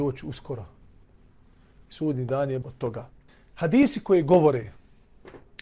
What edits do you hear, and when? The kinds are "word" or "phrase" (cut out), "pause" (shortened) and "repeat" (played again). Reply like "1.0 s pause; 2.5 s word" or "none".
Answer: 2.6 s word; 3.3 s pause